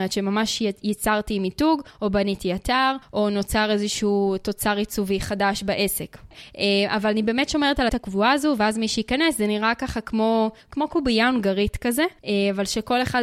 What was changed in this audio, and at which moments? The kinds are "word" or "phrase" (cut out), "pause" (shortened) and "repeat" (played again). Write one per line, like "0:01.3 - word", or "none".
0:07.9 - word